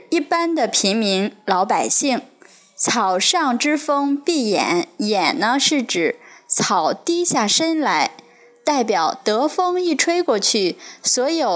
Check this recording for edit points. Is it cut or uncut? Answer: uncut